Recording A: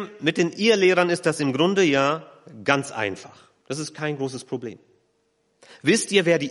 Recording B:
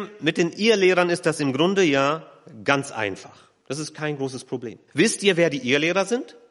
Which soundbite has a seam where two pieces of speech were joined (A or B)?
B